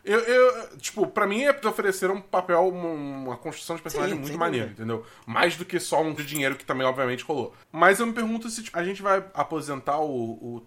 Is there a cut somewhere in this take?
yes; 3 cuts; at 1.6 s, 6.2 s, 8.7 s

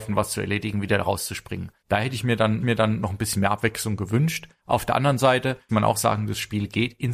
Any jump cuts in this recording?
yes; 4 cuts; at 1.8 s, 2.6 s, 4.6 s, 5.7 s

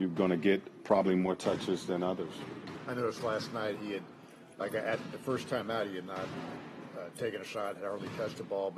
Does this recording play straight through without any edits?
yes; 0 cuts

